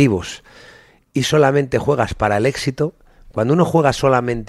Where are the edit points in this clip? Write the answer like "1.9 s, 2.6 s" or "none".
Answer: none